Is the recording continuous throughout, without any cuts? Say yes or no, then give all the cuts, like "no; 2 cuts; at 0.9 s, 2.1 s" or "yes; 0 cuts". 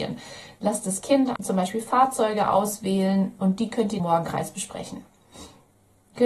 no; 2 cuts; at 1.4 s, 4.0 s